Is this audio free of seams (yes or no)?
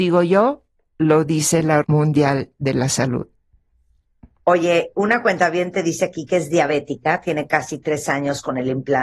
no